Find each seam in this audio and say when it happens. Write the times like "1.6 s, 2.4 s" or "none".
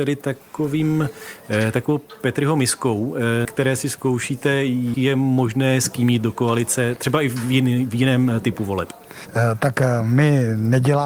3.4 s, 4.9 s